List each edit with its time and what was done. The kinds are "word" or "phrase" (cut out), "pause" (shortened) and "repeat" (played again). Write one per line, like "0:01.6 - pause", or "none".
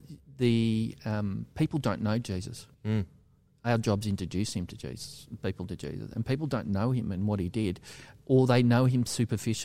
0:02.7 - pause